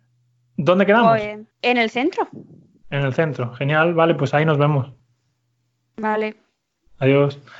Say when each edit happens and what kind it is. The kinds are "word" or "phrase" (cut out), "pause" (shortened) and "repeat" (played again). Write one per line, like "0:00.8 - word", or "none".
0:01.5 - pause